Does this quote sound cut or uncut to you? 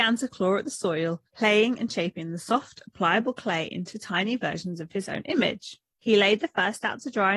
cut